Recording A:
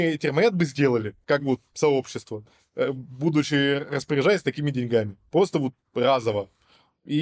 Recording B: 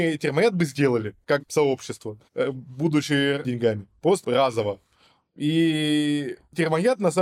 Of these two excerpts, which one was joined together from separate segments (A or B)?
B